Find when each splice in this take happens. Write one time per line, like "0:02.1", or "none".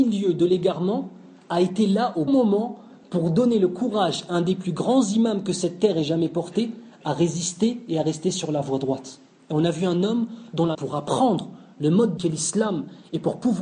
0:02.3
0:09.3
0:10.7
0:12.2

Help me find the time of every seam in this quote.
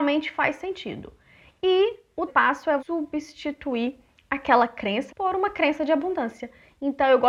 0:02.3
0:02.8
0:05.1

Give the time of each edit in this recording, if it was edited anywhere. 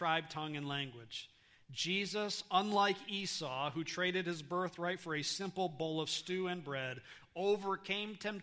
none

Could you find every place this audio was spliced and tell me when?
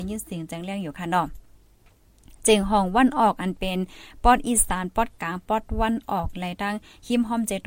none

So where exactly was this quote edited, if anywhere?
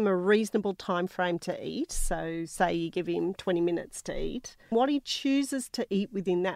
0:04.7

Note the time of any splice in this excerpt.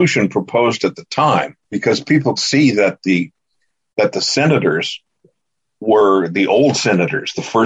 0:01.6
0:02.4

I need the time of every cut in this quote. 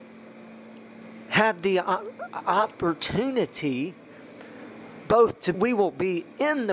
0:05.5

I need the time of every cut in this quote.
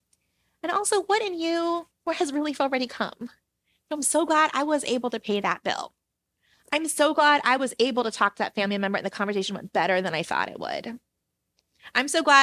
none

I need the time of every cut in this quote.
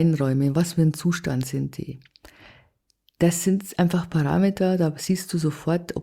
none

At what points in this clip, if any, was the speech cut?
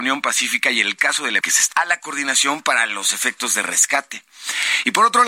0:01.4
0:01.7

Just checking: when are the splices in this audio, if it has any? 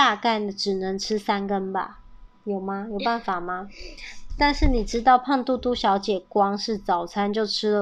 0:02.3

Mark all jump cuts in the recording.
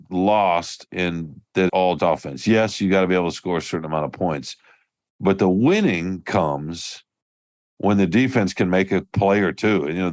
0:01.7
0:02.0

